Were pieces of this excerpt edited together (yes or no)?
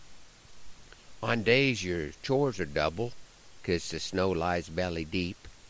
no